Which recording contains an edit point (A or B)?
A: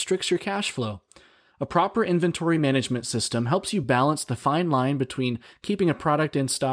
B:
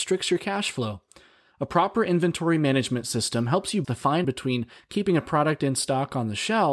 B